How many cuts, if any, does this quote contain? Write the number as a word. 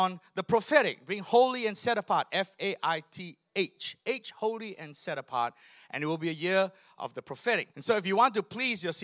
one